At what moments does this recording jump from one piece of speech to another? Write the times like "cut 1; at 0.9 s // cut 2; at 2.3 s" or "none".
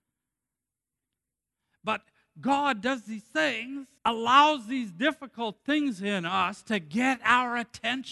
cut 1; at 4.0 s

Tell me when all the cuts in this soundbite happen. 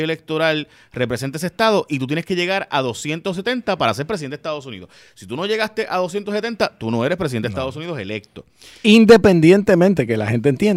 none

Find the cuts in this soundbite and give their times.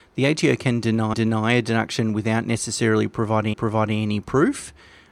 cut 1; at 1.1 s // cut 2; at 3.5 s

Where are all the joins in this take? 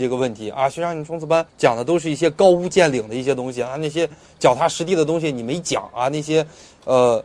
cut 1; at 1.5 s

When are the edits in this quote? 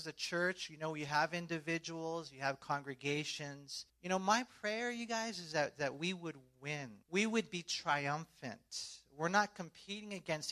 cut 1; at 3.9 s // cut 2; at 7.0 s

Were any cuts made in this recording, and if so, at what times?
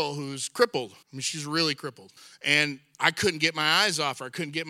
cut 1; at 1.0 s // cut 2; at 2.2 s

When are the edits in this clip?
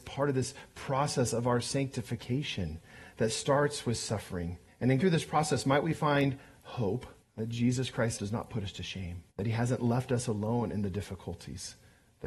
cut 1; at 4.7 s // cut 2; at 5.0 s // cut 3; at 7.2 s // cut 4; at 8.2 s // cut 5; at 9.3 s

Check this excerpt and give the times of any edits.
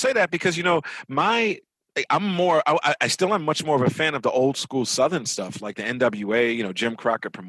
none

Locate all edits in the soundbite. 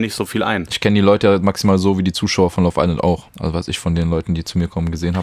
cut 1; at 3.3 s

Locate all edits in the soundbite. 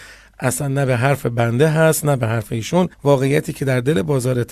cut 1; at 2.9 s

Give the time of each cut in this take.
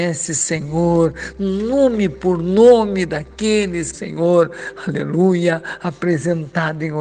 cut 1; at 3.9 s

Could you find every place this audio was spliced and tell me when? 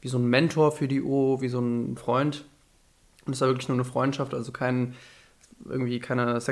cut 1; at 2.0 s

